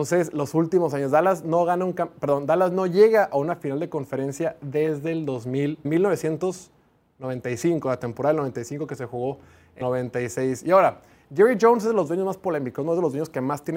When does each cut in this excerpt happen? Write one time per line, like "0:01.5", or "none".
0:05.8
0:09.8